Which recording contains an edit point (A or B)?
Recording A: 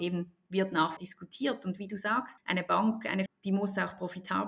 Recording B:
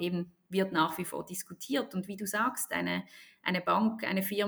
A